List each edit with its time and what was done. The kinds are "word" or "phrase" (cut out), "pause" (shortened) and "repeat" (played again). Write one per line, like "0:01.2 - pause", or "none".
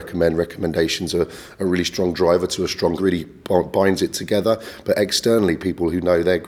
0:03.0 - phrase

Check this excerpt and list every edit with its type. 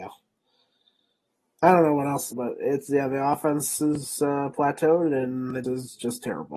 0:02.3 - phrase
0:02.9 - word
0:05.6 - word

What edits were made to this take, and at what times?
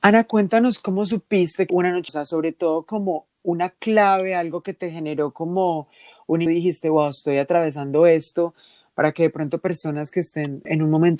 0:01.7 - phrase
0:02.1 - phrase
0:03.4 - pause
0:06.5 - word

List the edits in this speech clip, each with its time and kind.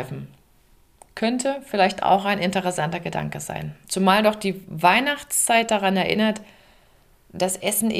0:03.8 - pause

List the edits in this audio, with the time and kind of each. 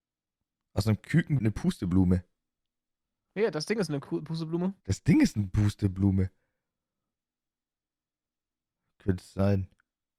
0:01.4 - word
0:04.8 - pause

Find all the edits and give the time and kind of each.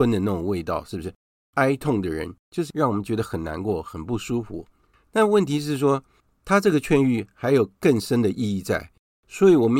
none

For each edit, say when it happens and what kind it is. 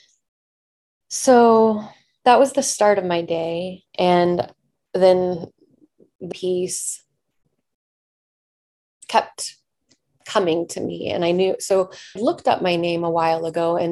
0:03.9 - pause
0:06.3 - word
0:12.2 - phrase

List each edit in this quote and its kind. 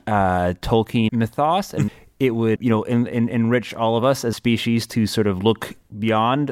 0:01.1 - word
0:01.9 - word
0:02.6 - word
0:04.3 - phrase

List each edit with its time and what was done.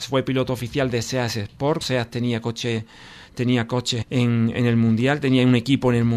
0:01.8 - word
0:04.0 - word

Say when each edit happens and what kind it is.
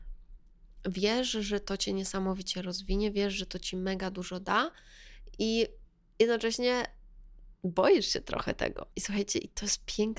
0:07.5 - pause
0:08.9 - pause

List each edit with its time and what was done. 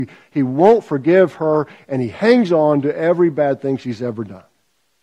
none

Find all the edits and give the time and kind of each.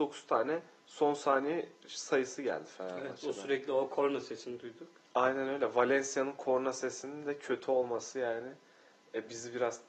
none

